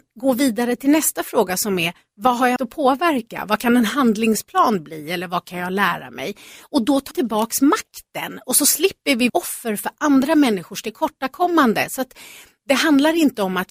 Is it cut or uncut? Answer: cut